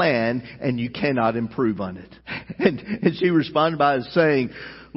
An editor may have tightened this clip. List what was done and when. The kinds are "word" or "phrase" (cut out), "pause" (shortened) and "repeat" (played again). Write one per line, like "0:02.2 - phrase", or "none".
0:02.2 - pause